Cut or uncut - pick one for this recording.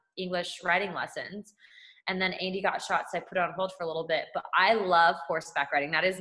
uncut